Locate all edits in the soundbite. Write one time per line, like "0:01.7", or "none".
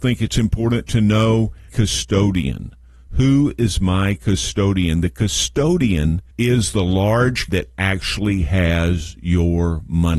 0:01.7
0:06.3
0:07.5